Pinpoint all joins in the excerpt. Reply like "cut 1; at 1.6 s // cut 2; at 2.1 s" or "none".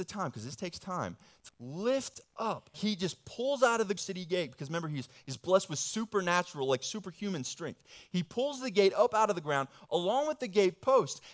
cut 1; at 1.5 s // cut 2; at 2.7 s // cut 3; at 4.0 s